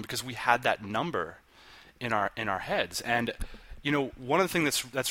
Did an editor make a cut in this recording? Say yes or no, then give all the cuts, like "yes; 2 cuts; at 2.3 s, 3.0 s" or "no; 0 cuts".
no; 0 cuts